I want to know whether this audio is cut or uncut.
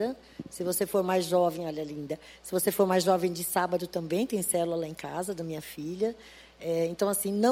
uncut